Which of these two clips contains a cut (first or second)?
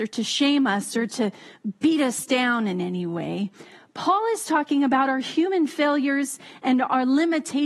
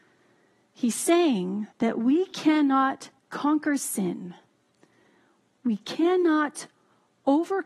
second